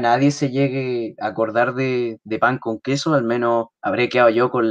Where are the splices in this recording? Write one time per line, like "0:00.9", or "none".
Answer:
0:03.8